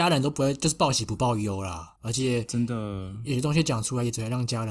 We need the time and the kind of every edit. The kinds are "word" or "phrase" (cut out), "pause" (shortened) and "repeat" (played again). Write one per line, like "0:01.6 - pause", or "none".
0:02.0 - pause